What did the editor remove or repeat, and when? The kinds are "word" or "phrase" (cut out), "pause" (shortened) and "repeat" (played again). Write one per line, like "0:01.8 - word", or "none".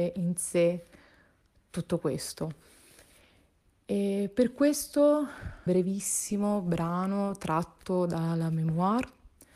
0:05.7 - phrase